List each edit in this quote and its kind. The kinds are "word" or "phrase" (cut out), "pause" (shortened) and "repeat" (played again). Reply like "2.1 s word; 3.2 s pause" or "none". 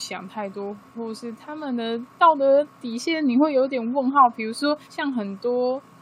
2.7 s pause; 4.8 s pause

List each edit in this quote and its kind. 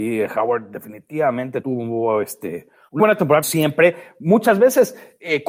1.6 s word; 3.0 s word; 3.4 s word

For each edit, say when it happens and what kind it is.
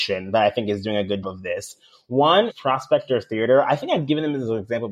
1.2 s word; 2.5 s word

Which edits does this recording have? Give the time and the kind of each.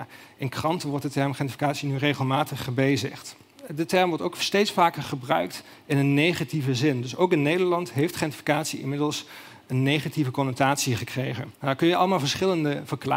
11.5 s pause

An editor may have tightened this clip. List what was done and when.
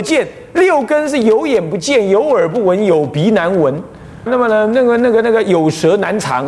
4.3 s word

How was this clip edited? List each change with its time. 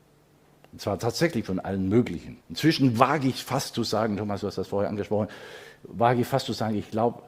2.4 s pause

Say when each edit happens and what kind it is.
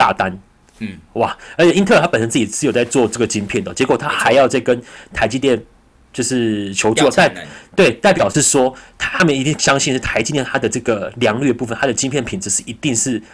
none

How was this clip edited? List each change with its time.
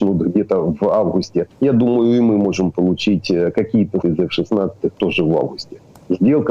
1.5 s pause; 4.0 s word

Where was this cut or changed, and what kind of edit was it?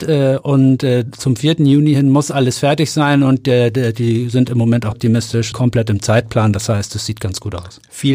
4.9 s word; 5.5 s word

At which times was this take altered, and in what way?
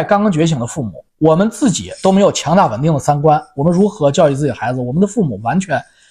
1.1 s pause

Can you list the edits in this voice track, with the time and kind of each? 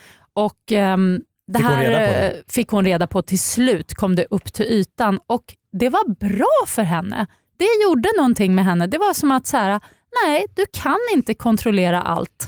none

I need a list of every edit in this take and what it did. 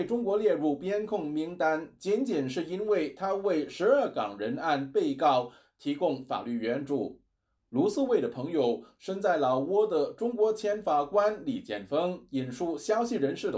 none

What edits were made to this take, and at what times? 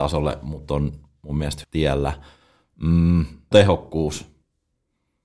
1.6 s word; 3.5 s word

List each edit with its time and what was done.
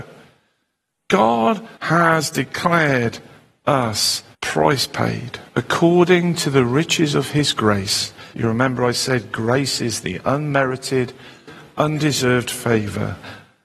1.7 s pause; 4.3 s pause; 5.5 s pause; 8.3 s pause

